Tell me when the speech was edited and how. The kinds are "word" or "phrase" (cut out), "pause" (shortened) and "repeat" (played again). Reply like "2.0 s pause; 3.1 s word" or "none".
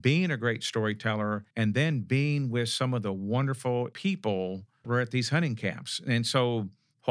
1.5 s pause; 3.9 s word; 4.8 s word